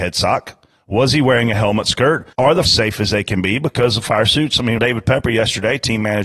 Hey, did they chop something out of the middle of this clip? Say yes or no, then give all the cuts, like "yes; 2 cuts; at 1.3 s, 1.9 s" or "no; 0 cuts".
yes; 3 cuts; at 2.3 s, 2.6 s, 4.8 s